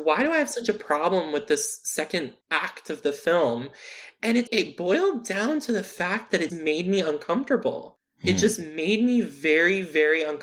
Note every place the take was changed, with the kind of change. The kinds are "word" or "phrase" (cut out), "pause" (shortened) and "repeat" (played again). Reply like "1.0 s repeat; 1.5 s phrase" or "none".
2.4 s pause; 4.5 s word; 6.5 s word